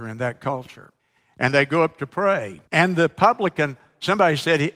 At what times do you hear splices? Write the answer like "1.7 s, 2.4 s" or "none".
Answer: 1.0 s, 2.7 s

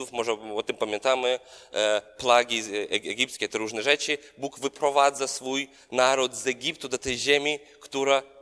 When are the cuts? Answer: none

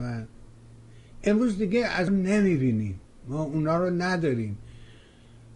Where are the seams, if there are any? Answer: 2.1 s

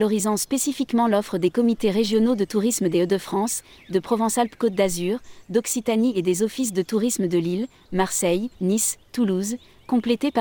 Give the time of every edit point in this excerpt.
8.5 s

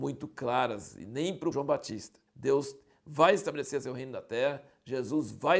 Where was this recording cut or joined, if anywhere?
1.5 s, 2.3 s

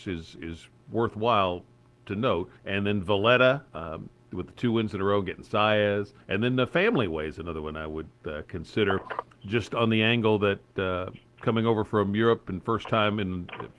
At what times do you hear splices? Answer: 2.6 s, 3.7 s, 6.2 s, 11.2 s

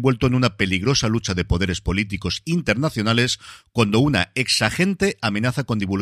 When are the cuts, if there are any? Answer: none

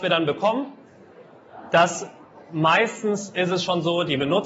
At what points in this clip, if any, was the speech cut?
none

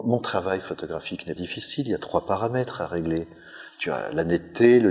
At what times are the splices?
1.4 s

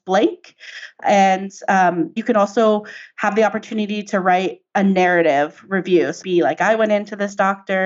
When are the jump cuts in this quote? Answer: 2.2 s, 6.2 s

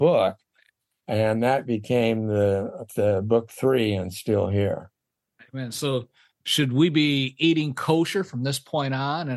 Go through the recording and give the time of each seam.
none

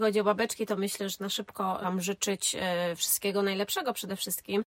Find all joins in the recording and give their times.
1.2 s, 1.8 s

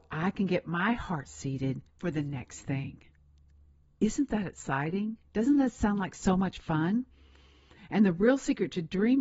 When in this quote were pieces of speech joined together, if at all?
1.9 s

